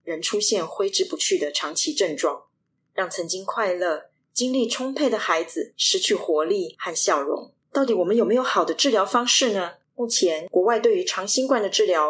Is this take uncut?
no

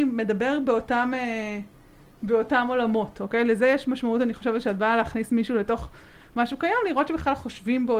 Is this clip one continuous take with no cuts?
yes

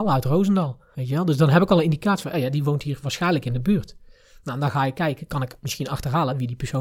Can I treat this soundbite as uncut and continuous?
yes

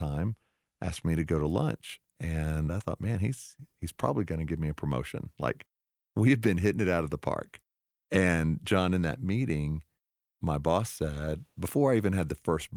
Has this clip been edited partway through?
no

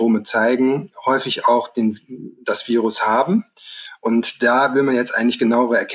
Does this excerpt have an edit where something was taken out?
no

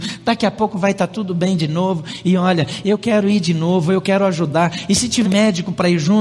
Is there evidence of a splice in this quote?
yes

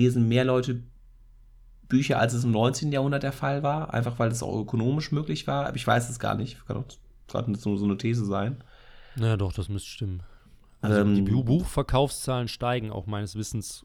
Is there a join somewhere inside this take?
no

